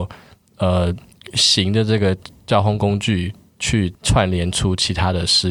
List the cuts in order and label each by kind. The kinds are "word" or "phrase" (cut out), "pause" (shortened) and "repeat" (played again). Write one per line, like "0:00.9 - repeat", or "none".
none